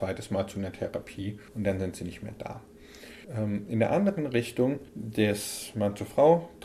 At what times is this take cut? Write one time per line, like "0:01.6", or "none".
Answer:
0:01.5
0:03.2
0:04.9